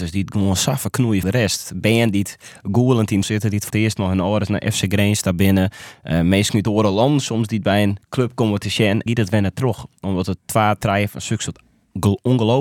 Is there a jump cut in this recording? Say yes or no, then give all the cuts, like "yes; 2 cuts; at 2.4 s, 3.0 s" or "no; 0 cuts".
yes; 5 cuts; at 1.2 s, 3.2 s, 3.7 s, 8.0 s, 9.1 s